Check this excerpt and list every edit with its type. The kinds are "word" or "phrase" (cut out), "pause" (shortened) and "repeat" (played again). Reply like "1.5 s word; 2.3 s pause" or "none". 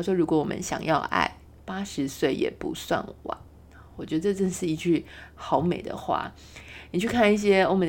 none